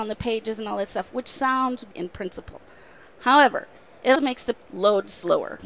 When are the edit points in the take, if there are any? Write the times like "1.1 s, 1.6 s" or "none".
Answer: 1.9 s, 4.1 s, 4.6 s